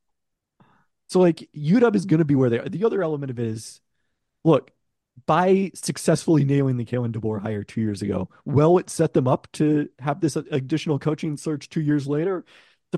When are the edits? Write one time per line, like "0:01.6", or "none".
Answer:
none

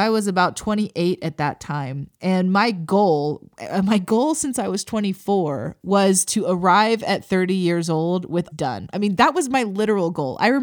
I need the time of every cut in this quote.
0:08.5

